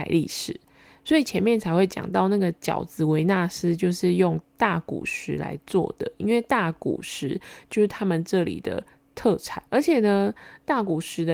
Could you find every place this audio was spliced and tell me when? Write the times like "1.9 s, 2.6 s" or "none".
9.7 s